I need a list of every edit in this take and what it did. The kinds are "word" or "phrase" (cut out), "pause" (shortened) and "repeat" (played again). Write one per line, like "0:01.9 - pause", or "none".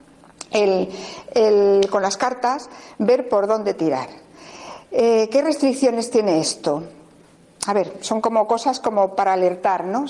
none

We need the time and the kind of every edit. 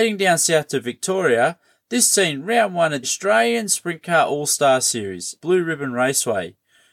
0:03.0 - word
0:05.4 - word

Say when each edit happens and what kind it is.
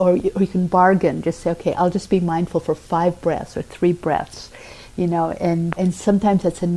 0:05.8 - word

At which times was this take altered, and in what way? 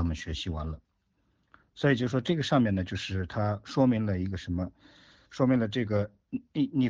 none

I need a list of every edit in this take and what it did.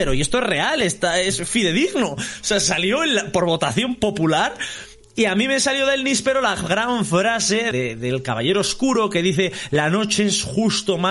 0:07.7 - word

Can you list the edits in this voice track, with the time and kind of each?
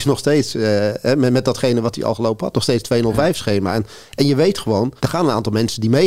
0:05.0 - pause

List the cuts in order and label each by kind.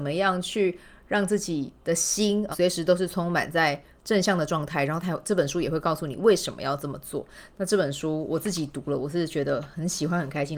0:01.8 - pause
0:02.5 - word

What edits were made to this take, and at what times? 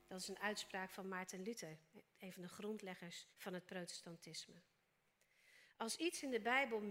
0:03.3 - pause

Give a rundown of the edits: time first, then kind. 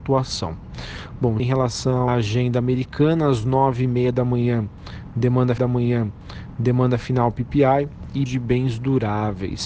0:01.4 - word
0:02.1 - word
0:05.6 - repeat
0:08.3 - word

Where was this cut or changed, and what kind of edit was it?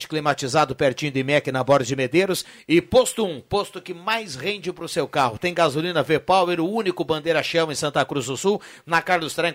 none

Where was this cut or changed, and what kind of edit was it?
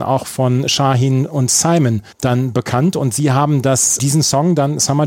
0:02.1 - pause

